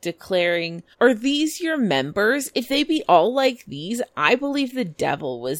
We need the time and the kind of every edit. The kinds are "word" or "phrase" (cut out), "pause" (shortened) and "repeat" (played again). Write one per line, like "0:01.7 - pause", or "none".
0:00.9 - pause